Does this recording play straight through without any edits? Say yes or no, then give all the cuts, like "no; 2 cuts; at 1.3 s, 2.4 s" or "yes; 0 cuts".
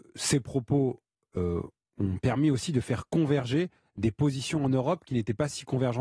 yes; 0 cuts